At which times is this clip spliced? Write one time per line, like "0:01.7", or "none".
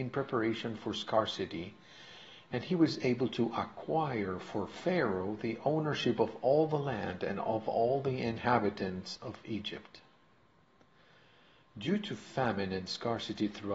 none